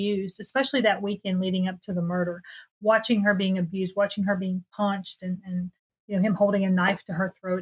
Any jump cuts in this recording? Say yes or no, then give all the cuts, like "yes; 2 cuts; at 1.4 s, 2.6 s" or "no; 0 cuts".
no; 0 cuts